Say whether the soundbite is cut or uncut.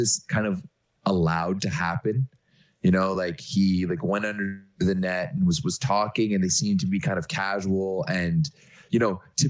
uncut